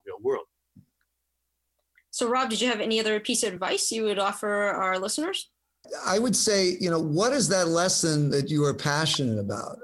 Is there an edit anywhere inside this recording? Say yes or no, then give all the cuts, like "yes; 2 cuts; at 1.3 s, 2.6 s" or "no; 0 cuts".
no; 0 cuts